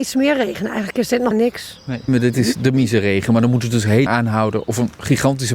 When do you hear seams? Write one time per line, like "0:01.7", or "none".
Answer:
0:01.3
0:02.1
0:04.1